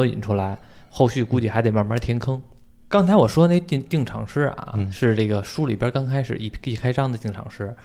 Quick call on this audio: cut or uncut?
uncut